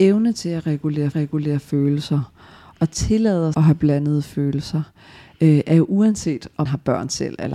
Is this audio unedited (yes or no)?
no